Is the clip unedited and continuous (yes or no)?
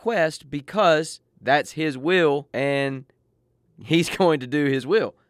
no